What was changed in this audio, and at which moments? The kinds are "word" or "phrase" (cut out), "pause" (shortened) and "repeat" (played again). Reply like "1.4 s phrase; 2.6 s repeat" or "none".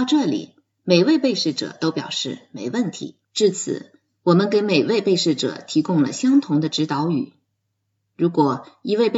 3.2 s pause